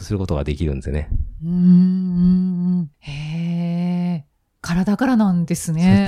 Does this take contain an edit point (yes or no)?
yes